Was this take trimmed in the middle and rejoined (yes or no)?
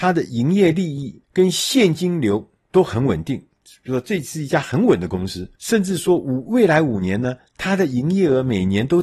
yes